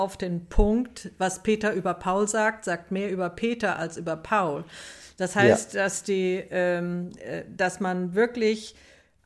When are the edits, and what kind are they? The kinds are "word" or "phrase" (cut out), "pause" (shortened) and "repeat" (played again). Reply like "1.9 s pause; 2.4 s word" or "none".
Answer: none